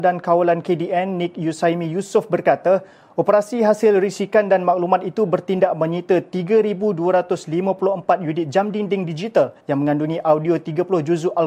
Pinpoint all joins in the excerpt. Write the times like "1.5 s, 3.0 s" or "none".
9.6 s